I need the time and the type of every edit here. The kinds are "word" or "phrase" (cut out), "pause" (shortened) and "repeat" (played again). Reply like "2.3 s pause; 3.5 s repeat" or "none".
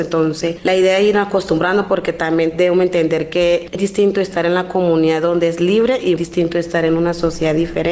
3.7 s word; 6.2 s word